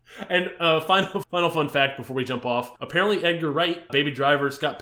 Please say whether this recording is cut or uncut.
cut